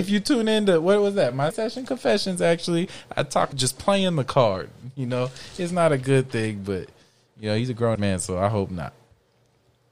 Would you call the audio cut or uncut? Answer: cut